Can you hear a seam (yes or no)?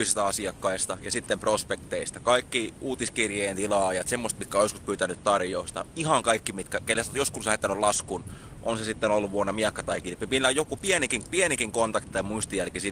no